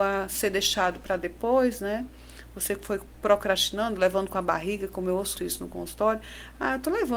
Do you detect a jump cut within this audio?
yes; 1 cut; at 5.4 s

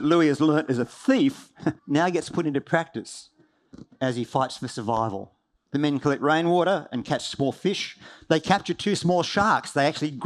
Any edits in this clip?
yes; 2 cuts; at 1.8 s, 5.6 s

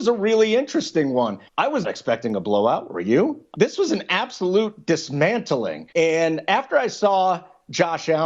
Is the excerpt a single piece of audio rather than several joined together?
no; 4 cuts; at 1.5 s, 1.8 s, 3.5 s, 5.9 s

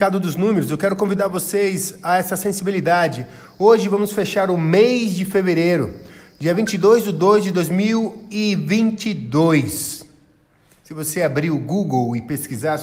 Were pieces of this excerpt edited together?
no; 0 cuts

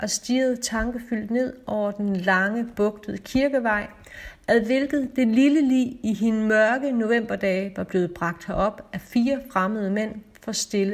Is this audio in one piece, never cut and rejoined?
yes; 0 cuts

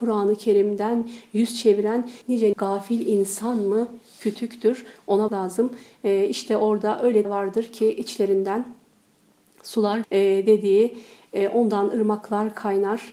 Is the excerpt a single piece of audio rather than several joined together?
no; 5 cuts; at 2.2 s, 2.5 s, 5.3 s, 7.2 s, 10.0 s

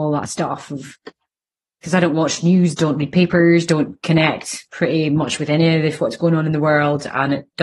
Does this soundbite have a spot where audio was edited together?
no; 0 cuts

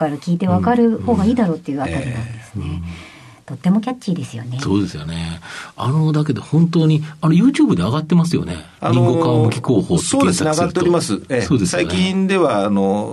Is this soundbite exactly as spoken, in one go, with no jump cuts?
yes; 0 cuts

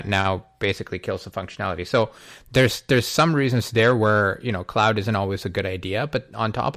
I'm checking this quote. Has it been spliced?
no; 0 cuts

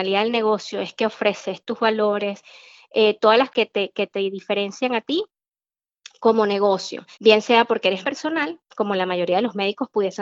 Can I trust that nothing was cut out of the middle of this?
no; 3 cuts; at 3.5 s, 7.1 s, 8.0 s

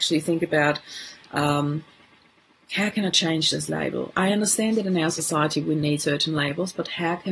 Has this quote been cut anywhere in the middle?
no; 0 cuts

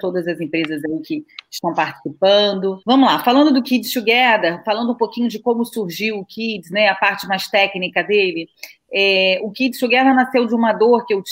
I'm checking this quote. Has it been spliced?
yes; 1 cut; at 2.8 s

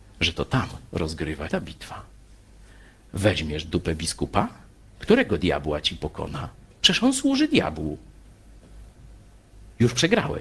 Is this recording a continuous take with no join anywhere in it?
no; 1 cut; at 1.5 s

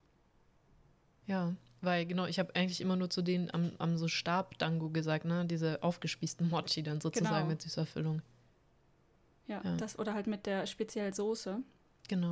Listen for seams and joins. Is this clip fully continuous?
yes; 0 cuts

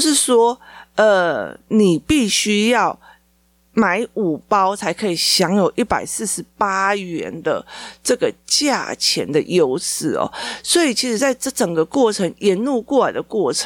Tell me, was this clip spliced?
no; 0 cuts

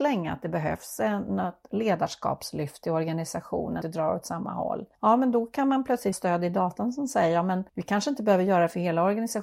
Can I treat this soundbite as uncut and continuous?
no; 4 cuts; at 3.8 s, 4.9 s, 6.1 s, 7.7 s

